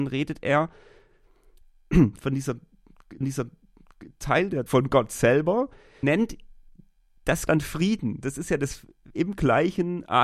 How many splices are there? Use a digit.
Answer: 5